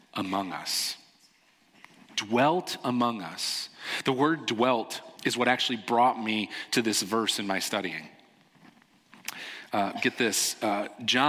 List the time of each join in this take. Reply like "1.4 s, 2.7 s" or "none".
5.2 s